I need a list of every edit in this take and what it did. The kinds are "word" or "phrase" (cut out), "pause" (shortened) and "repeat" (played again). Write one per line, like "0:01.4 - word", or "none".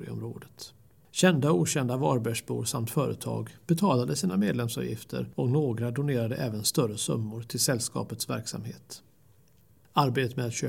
none